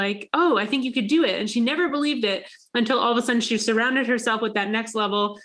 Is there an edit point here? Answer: no; 0 cuts

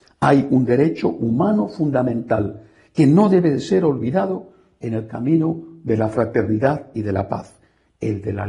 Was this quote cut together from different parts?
no; 0 cuts

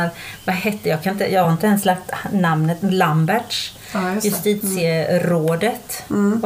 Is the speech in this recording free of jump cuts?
yes; 0 cuts

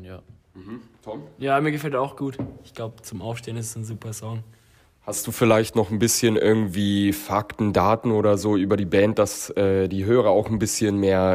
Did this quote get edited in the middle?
no; 0 cuts

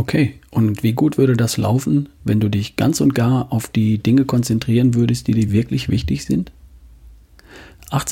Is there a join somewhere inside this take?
no; 0 cuts

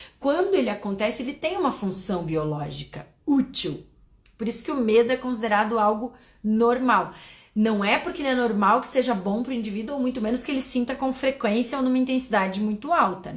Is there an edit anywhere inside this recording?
no; 0 cuts

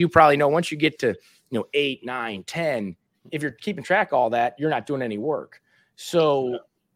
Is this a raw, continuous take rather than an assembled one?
yes; 0 cuts

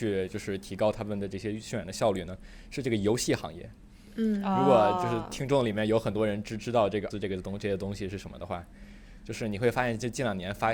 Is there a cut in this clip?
yes; 1 cut; at 7.1 s

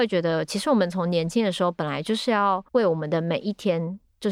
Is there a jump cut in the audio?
yes; 1 cut; at 2.7 s

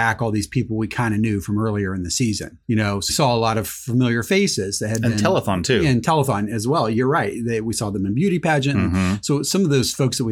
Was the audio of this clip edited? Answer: yes; 2 cuts; at 2.6 s, 3.1 s

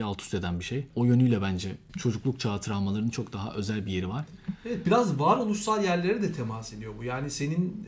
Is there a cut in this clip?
no; 0 cuts

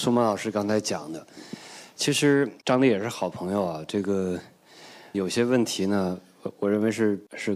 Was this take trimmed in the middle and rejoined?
yes; 1 cut; at 5.1 s

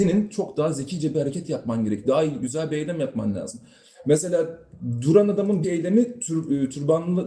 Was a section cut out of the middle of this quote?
yes; 1 cut; at 5.6 s

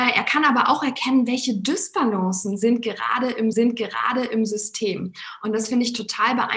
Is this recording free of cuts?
no; 1 cut; at 3.5 s

